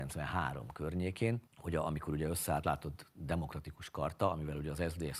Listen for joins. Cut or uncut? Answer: cut